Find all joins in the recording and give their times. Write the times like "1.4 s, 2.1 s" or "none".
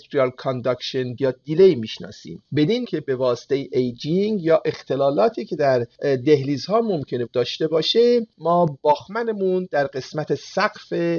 1.2 s, 2.8 s, 7.3 s